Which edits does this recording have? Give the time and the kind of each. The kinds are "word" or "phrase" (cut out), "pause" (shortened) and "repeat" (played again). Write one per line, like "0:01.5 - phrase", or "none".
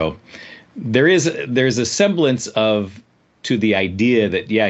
0:03.4 - word